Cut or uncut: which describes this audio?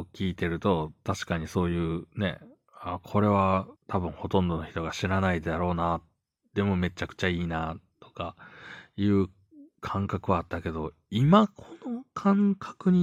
cut